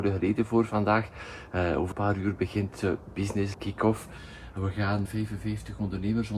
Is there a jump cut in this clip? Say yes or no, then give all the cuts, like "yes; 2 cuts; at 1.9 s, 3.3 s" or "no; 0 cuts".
yes; 3 cuts; at 1.9 s, 3.5 s, 5.1 s